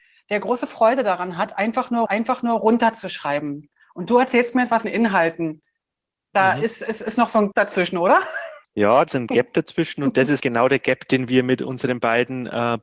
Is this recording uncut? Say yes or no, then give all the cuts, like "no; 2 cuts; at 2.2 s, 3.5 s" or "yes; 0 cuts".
no; 6 cuts; at 2.1 s, 4.8 s, 7.5 s, 8.6 s, 9.1 s, 10.4 s